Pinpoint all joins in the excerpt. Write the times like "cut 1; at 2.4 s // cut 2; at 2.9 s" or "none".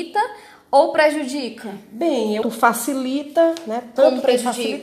cut 1; at 2.4 s

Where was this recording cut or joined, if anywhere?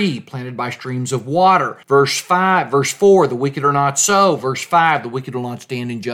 cut 1; at 1.8 s

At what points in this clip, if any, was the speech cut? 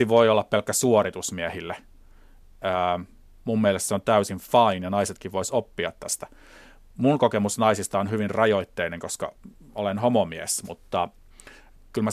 none

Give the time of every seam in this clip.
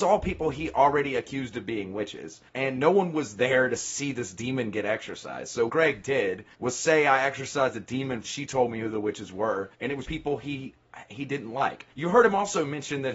cut 1; at 2.5 s // cut 2; at 5.7 s // cut 3; at 6.5 s // cut 4; at 8.2 s // cut 5; at 9.7 s // cut 6; at 10.0 s // cut 7; at 11.9 s

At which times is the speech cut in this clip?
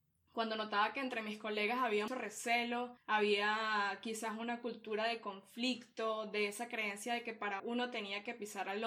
cut 1; at 2.1 s // cut 2; at 3.0 s // cut 3; at 7.6 s

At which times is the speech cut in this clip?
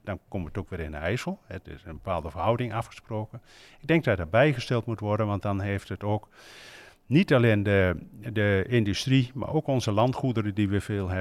none

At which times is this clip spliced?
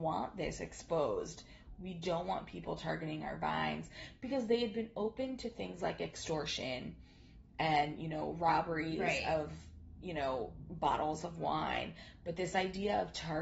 none

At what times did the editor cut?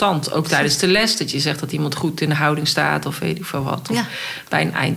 none

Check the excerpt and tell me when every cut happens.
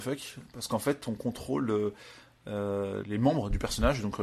cut 1; at 3.0 s

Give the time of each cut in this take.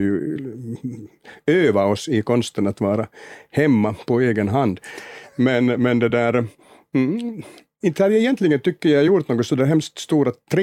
none

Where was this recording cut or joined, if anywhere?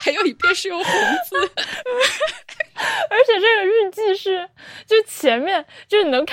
cut 1; at 1.8 s

